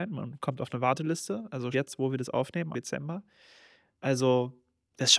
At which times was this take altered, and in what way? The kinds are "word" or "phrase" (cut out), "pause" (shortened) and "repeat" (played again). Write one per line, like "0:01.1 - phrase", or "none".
0:01.7 - word
0:02.7 - word